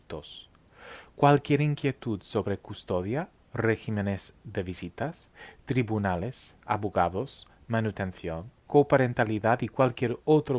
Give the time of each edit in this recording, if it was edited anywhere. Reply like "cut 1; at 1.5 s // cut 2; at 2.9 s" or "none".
cut 1; at 8.6 s